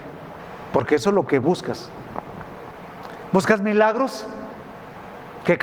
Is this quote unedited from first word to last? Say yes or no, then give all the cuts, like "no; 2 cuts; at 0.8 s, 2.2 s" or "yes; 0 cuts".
no; 1 cut; at 1.4 s